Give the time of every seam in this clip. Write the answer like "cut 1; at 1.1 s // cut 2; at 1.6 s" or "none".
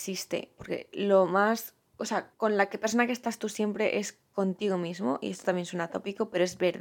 cut 1; at 2.3 s